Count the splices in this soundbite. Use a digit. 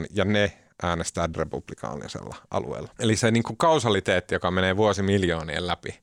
2